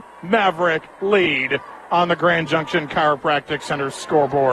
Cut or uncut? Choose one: uncut